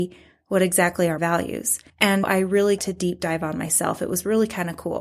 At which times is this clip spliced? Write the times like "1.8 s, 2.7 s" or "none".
1.2 s, 2.2 s, 2.8 s